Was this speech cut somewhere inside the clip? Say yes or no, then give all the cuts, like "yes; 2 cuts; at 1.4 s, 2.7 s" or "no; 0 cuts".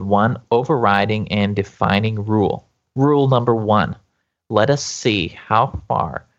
no; 0 cuts